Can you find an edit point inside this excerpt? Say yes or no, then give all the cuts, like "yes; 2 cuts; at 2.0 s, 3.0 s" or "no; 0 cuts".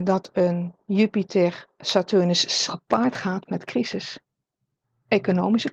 yes; 1 cut; at 2.7 s